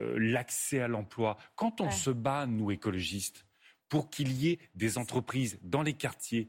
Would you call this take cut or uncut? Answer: uncut